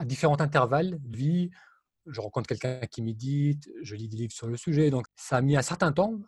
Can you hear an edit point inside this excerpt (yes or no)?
yes